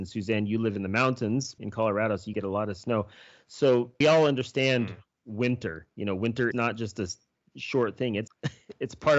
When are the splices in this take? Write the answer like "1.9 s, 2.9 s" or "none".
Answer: 1.6 s, 2.3 s, 4.0 s, 6.5 s, 8.3 s

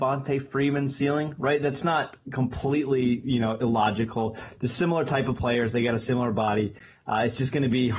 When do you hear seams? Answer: none

